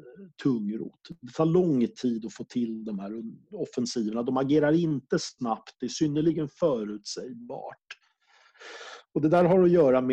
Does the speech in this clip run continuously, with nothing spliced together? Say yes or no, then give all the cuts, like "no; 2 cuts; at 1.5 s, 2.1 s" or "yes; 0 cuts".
no; 1 cut; at 3.4 s